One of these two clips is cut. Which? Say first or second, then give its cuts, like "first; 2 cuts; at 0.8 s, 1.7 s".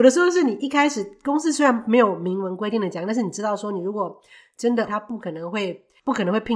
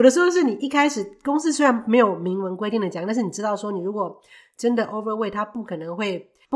first; 1 cut; at 4.9 s